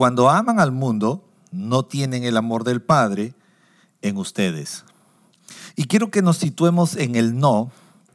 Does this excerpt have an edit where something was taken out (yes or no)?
no